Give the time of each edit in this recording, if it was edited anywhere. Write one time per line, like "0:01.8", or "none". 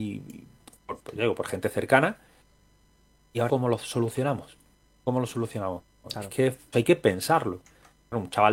0:01.0
0:03.5
0:06.7